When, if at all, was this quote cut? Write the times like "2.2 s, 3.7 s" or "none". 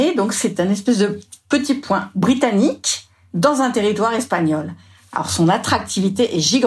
none